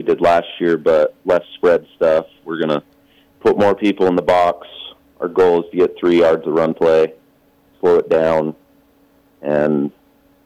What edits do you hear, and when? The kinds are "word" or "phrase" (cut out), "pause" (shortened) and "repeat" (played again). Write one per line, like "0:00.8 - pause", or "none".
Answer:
none